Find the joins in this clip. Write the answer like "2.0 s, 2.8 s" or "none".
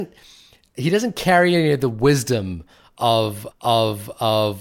3.5 s